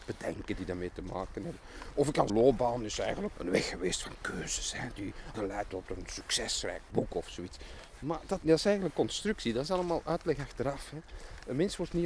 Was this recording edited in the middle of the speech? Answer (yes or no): yes